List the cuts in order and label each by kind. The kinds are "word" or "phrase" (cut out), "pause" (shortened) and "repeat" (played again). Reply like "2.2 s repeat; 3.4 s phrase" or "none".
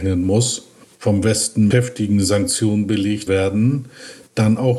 1.7 s word; 3.3 s word